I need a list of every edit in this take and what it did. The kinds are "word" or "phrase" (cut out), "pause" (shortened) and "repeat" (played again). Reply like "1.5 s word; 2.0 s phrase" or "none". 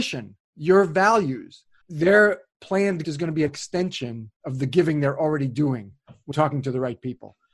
1.8 s pause; 3.0 s word; 3.5 s word; 4.4 s pause; 6.3 s word